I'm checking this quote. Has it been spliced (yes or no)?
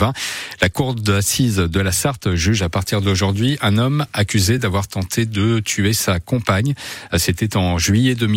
no